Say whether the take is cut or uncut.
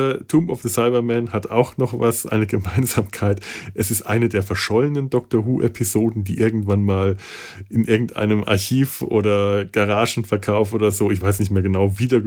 uncut